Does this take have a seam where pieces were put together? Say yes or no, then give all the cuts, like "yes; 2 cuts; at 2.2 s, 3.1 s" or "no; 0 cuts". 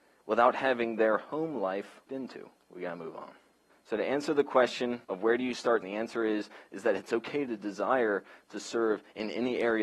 yes; 5 cuts; at 2.1 s, 2.6 s, 3.7 s, 5.0 s, 5.8 s